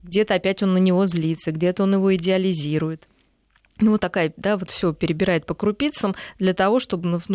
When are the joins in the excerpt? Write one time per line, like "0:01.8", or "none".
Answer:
none